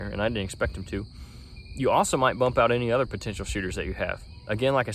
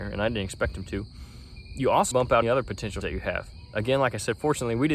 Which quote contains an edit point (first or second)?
second